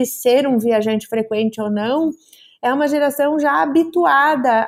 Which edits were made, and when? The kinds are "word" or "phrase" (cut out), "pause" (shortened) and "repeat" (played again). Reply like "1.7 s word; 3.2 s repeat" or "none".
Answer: none